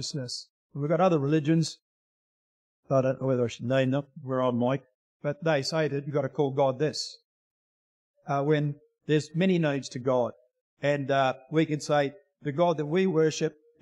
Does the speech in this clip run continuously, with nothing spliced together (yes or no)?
yes